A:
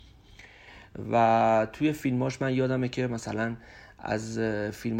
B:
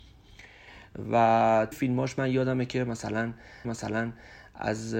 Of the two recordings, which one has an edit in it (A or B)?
B